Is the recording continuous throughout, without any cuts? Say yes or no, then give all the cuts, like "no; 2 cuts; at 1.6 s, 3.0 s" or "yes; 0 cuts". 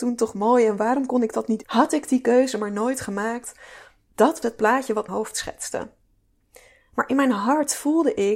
no; 3 cuts; at 1.6 s, 4.4 s, 5.1 s